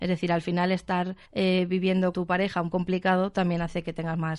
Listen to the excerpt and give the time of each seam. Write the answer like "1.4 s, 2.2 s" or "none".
1.2 s, 2.1 s, 2.7 s